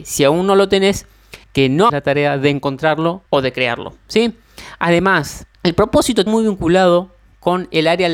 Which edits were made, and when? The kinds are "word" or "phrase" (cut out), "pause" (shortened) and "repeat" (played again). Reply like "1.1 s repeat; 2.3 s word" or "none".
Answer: 1.4 s pause; 1.9 s word; 3.3 s pause; 5.5 s pause; 6.3 s phrase